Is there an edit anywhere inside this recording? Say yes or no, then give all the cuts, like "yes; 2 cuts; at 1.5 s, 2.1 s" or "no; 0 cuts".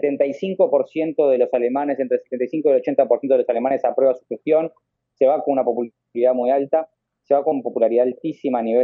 no; 0 cuts